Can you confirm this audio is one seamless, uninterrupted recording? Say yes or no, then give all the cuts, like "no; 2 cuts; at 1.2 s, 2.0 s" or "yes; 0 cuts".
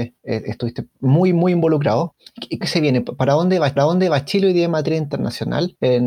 no; 2 cuts; at 2.6 s, 3.8 s